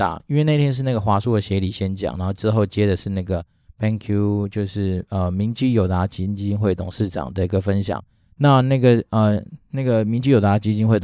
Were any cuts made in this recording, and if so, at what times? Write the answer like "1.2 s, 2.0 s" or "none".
none